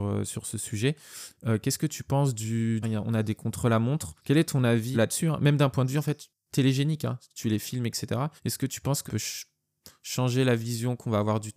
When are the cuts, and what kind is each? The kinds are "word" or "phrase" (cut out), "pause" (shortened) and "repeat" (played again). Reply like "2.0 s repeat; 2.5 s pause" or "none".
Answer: 2.8 s phrase; 4.2 s pause; 4.9 s word; 8.4 s pause; 9.1 s word